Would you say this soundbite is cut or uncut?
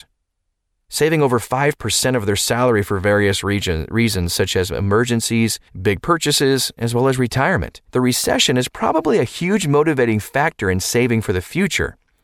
cut